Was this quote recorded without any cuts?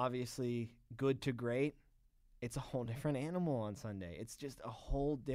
yes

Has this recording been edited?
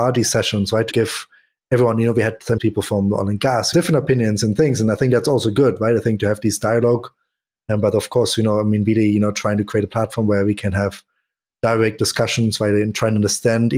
yes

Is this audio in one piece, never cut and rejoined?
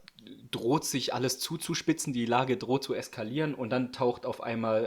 yes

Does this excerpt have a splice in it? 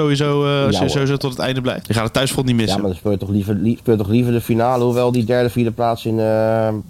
no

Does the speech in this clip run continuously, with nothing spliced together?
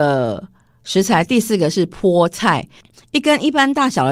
yes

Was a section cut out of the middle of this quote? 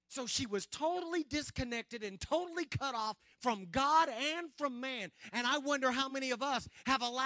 no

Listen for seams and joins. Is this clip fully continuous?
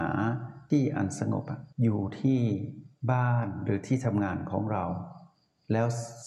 no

